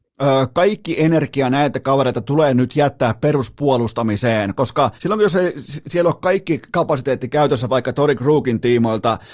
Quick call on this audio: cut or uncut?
cut